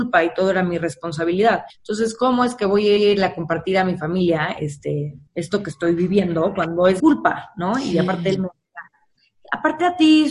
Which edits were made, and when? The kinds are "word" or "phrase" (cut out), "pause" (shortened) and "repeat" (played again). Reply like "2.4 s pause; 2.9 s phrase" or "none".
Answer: 1.7 s pause; 3.0 s repeat; 5.3 s pause; 7.0 s word